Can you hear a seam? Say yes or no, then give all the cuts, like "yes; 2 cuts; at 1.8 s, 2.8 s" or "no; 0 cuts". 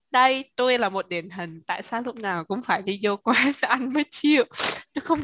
no; 0 cuts